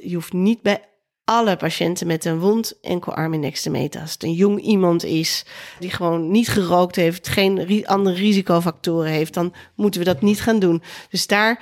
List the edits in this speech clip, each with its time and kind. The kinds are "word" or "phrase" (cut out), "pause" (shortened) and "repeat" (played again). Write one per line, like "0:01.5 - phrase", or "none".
0:02.8 - word
0:05.8 - word
0:07.2 - word